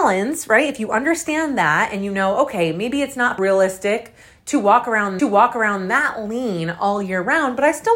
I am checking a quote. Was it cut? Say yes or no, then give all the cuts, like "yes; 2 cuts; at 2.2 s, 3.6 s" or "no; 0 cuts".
yes; 2 cuts; at 3.4 s, 5.2 s